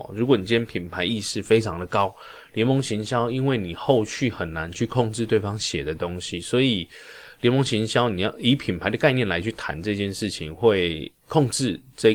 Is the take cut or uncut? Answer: uncut